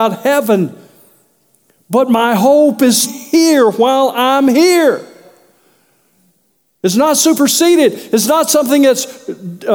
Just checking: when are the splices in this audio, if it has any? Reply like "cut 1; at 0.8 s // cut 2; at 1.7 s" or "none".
cut 1; at 3.0 s

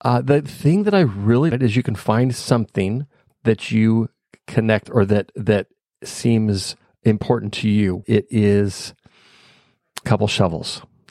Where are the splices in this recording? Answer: cut 1; at 1.5 s // cut 2; at 3.3 s // cut 3; at 4.9 s // cut 4; at 6.8 s // cut 5; at 8.0 s // cut 6; at 10.0 s

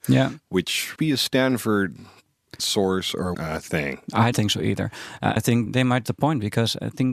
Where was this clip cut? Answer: cut 1; at 1.0 s // cut 2; at 2.6 s // cut 3; at 3.3 s // cut 4; at 4.3 s // cut 5; at 5.4 s // cut 6; at 5.7 s // cut 7; at 6.0 s

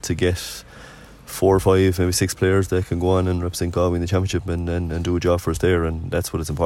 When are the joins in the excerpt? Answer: none

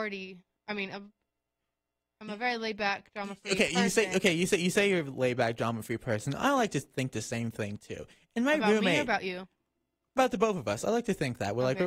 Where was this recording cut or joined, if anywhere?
none

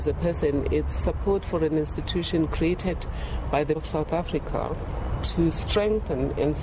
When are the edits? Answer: cut 1; at 3.7 s

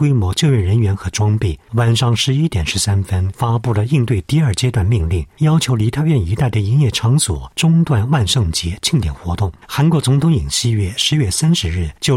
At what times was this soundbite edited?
cut 1; at 1.6 s // cut 2; at 9.6 s

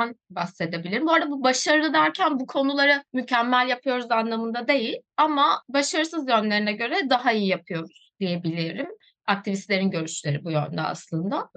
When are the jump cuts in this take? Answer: none

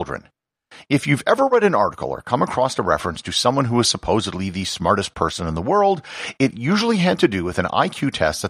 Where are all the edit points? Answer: none

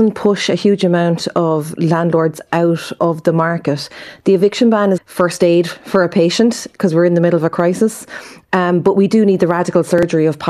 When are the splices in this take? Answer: cut 1; at 3.0 s // cut 2; at 5.0 s

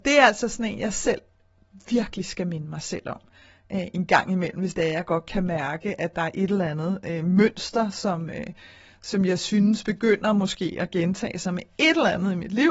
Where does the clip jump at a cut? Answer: none

